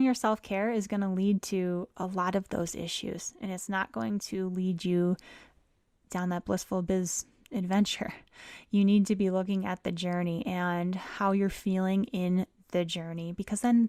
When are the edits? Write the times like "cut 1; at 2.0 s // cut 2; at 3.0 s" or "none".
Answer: none

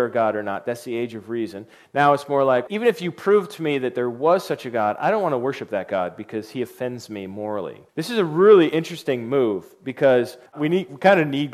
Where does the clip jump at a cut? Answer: cut 1; at 2.7 s // cut 2; at 7.9 s // cut 3; at 10.5 s

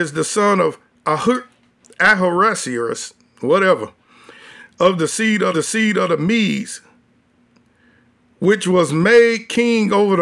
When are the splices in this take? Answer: cut 1; at 5.5 s

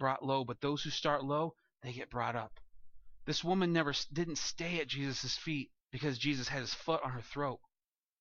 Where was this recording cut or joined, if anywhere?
cut 1; at 5.8 s

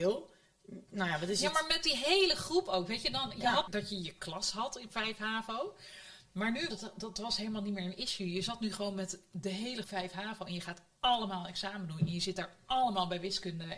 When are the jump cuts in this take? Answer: cut 1; at 3.7 s // cut 2; at 6.7 s // cut 3; at 9.8 s

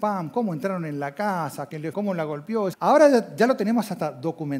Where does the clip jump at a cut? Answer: cut 1; at 1.9 s // cut 2; at 2.7 s

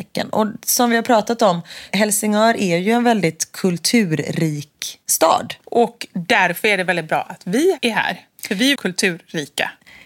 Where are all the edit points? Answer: cut 1; at 5.6 s // cut 2; at 8.7 s

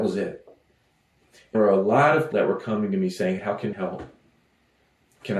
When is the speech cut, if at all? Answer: cut 1; at 1.5 s // cut 2; at 2.3 s // cut 3; at 3.4 s // cut 4; at 3.7 s

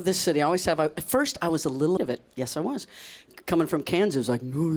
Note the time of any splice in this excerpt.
cut 1; at 2.0 s

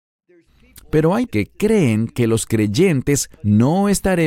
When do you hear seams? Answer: cut 1; at 1.3 s // cut 2; at 3.4 s

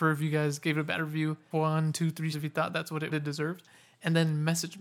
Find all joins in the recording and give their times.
cut 1; at 1.5 s // cut 2; at 2.3 s // cut 3; at 3.1 s

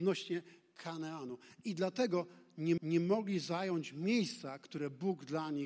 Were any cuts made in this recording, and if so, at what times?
cut 1; at 2.8 s

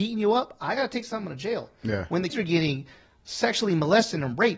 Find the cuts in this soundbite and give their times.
cut 1; at 2.3 s

